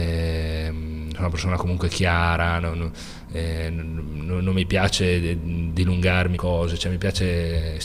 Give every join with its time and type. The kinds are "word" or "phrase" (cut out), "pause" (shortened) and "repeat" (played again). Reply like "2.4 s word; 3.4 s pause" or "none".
6.3 s phrase